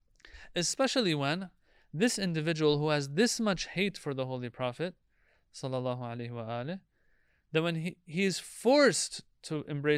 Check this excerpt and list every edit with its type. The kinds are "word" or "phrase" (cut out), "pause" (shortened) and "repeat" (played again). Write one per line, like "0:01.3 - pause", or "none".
none